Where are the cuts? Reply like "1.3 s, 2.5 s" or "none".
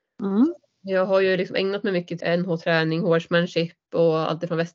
2.2 s

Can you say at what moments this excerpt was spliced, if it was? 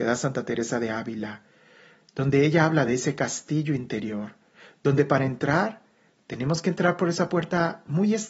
none

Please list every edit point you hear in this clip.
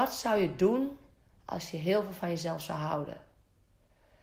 none

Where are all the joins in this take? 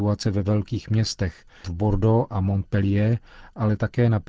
1.6 s

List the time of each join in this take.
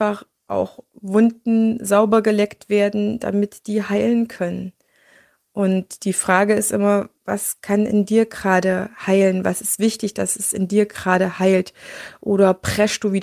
none

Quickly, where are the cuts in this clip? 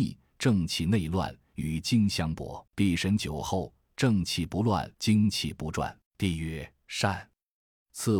2.7 s, 4.9 s, 6.1 s

